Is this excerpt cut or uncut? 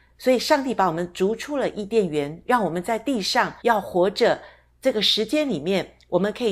cut